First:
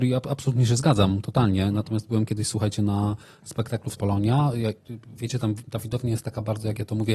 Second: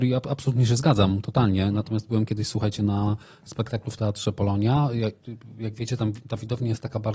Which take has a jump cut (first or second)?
first